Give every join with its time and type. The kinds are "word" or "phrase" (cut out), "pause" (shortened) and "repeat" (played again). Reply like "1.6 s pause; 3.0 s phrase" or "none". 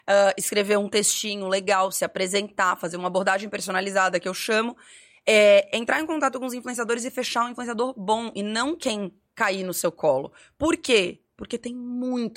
none